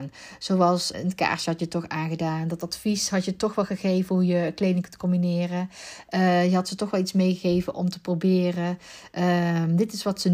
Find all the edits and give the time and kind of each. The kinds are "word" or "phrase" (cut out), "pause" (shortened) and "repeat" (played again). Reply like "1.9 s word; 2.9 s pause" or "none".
0.9 s word